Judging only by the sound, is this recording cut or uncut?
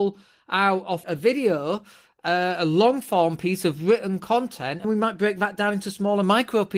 cut